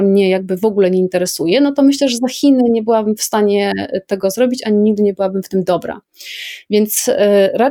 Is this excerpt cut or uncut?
uncut